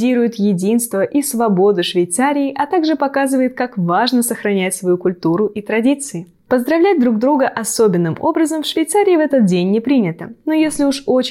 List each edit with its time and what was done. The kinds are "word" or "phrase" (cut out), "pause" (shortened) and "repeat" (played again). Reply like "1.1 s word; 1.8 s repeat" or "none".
none